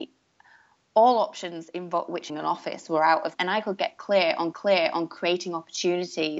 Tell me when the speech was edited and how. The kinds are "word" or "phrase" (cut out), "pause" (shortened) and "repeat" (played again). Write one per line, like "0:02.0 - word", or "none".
0:02.3 - phrase
0:03.3 - phrase
0:04.5 - repeat